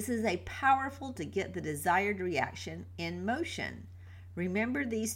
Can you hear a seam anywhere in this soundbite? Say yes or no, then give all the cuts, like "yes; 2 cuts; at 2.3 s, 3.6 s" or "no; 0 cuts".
yes; 1 cut; at 1.2 s